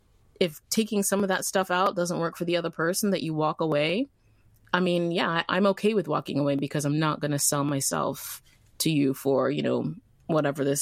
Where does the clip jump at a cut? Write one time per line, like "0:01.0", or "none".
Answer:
none